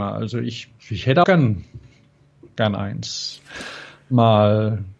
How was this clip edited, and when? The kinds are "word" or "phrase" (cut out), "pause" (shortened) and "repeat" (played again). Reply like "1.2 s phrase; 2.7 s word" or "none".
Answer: 1.2 s word